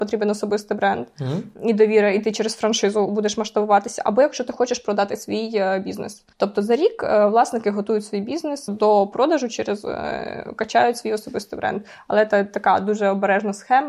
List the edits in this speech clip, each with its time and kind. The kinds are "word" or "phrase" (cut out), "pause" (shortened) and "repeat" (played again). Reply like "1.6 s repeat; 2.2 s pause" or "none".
6.3 s pause; 8.7 s word